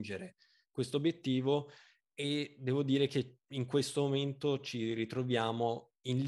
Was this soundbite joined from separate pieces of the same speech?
no; 0 cuts

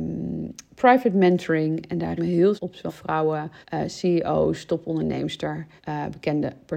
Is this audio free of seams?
no; 5 cuts; at 2.2 s, 2.6 s, 2.9 s, 3.6 s, 5.8 s

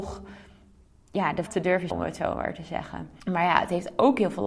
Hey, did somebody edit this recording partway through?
yes; 3 cuts; at 1.5 s, 1.9 s, 3.2 s

